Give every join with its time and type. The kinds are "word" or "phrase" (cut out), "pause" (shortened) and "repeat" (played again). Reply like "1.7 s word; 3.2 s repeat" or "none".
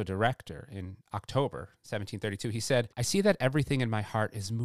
2.9 s pause